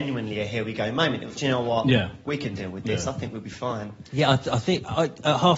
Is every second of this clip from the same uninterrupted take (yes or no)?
no